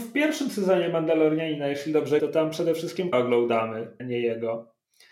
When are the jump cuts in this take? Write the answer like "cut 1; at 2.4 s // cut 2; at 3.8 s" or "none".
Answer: cut 1; at 2.2 s // cut 2; at 3.1 s // cut 3; at 4.0 s